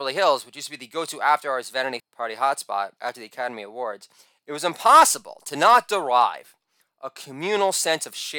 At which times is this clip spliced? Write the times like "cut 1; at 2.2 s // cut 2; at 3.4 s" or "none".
cut 1; at 2.0 s // cut 2; at 3.0 s